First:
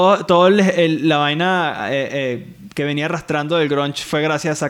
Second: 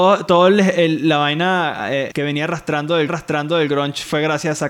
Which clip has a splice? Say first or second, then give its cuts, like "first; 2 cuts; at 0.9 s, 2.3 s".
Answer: second; 2 cuts; at 2.1 s, 3.1 s